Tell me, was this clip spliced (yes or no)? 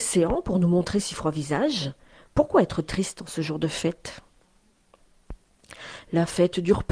no